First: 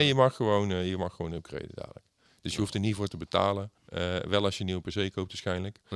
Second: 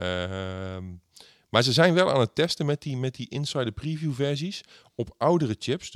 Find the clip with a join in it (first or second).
first